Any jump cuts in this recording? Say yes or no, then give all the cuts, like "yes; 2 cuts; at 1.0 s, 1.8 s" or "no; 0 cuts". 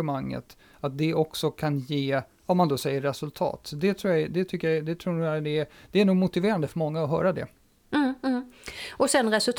no; 0 cuts